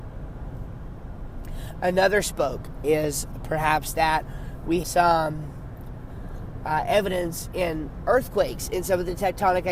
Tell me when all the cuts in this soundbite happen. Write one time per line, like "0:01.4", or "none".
0:02.8
0:04.8